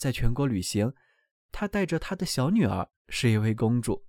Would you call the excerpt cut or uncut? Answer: cut